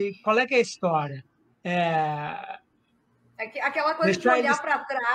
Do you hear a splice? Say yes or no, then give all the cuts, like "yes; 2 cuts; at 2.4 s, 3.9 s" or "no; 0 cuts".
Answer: no; 0 cuts